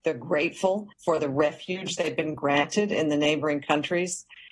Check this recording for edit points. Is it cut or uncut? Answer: cut